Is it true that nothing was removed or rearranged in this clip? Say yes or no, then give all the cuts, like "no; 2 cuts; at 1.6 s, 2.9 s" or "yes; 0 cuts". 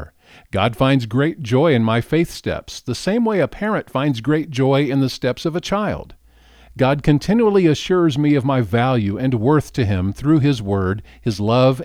yes; 0 cuts